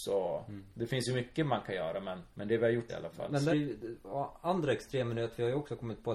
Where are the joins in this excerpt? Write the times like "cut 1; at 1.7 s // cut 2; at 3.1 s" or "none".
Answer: cut 1; at 2.3 s // cut 2; at 2.9 s // cut 3; at 3.5 s